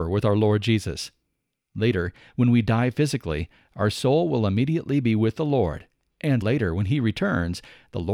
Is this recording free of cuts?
no; 1 cut; at 6.4 s

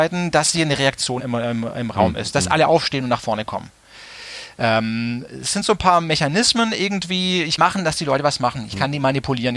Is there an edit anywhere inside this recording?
yes; 2 cuts; at 1.2 s, 7.6 s

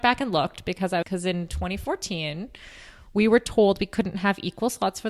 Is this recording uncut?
no; 1 cut; at 1.0 s

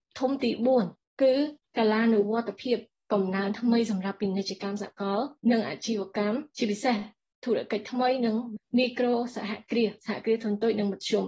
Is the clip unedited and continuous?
no; 2 cuts; at 5.4 s, 6.5 s

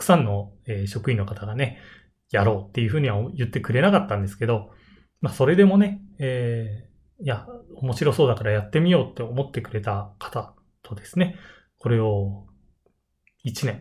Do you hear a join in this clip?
no; 0 cuts

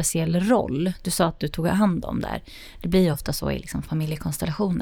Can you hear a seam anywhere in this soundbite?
no; 0 cuts

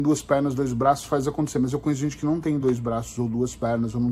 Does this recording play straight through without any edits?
yes; 0 cuts

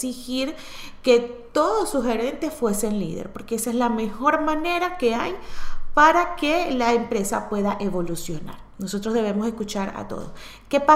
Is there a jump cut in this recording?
no; 0 cuts

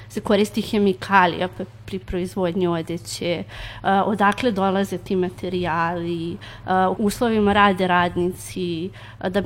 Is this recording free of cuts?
no; 1 cut; at 7.0 s

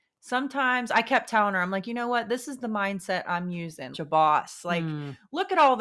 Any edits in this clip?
yes; 1 cut; at 3.9 s

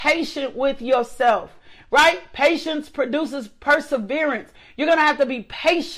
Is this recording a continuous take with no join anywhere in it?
yes; 0 cuts

